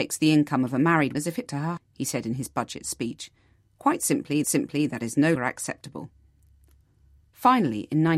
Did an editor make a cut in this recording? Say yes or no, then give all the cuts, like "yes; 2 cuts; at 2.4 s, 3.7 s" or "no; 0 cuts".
yes; 5 cuts; at 1.1 s, 1.5 s, 1.8 s, 4.4 s, 5.4 s